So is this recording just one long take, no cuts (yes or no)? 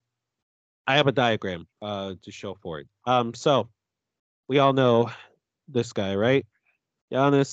no